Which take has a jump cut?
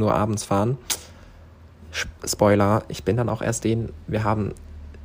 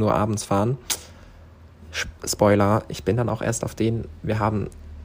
first; 1 cut; at 3.6 s

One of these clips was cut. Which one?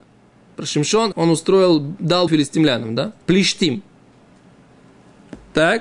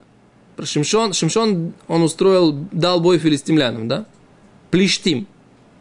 first; 3 cuts; at 1.1 s, 2.3 s, 3.2 s

